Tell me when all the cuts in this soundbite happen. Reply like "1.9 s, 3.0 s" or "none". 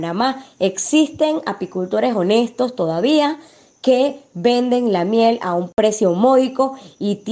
none